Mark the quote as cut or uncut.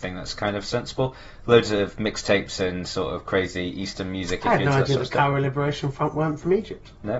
uncut